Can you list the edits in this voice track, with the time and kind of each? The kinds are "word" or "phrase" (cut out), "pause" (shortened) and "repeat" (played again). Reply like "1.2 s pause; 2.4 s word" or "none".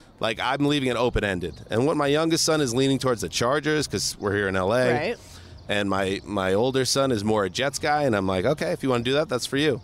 none